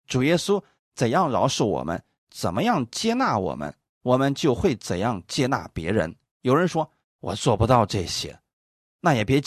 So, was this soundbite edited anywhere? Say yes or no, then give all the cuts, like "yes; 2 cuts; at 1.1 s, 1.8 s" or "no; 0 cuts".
no; 0 cuts